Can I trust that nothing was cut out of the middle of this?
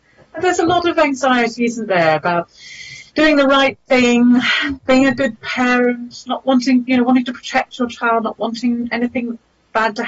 no; 1 cut; at 3.1 s

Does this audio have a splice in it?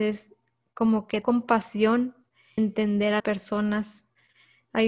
yes; 3 cuts; at 1.2 s, 2.6 s, 3.2 s

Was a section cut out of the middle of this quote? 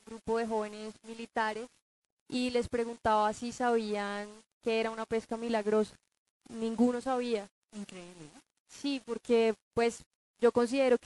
no; 0 cuts

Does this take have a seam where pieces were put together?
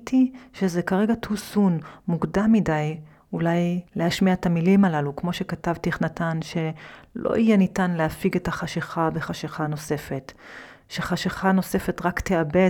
yes; 1 cut; at 3.9 s

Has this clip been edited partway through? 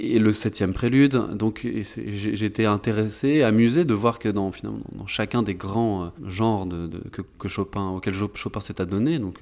yes; 1 cut; at 6.2 s

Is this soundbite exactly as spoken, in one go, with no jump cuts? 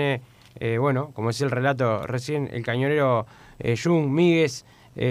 yes; 0 cuts

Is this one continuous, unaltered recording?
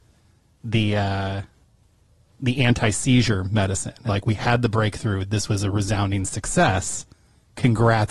no; 1 cut; at 4.1 s

